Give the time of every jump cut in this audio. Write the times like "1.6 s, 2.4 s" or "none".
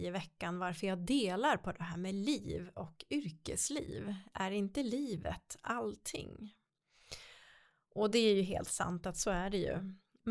none

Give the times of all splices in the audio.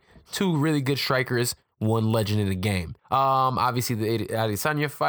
3.0 s

